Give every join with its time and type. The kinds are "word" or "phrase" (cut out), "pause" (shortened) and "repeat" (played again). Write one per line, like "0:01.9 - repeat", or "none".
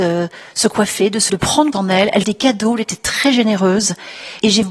0:01.3 - word
0:01.7 - word
0:02.2 - word